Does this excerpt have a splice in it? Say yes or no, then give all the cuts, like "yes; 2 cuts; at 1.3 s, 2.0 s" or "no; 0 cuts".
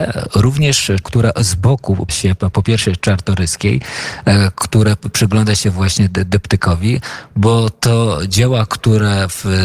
yes; 2 cuts; at 1.0 s, 2.1 s